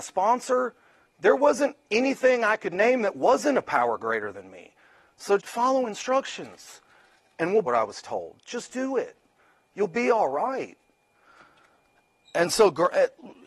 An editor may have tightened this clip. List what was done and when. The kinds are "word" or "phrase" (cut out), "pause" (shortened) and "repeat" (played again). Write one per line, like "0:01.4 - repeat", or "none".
0:05.4 - word
0:07.6 - phrase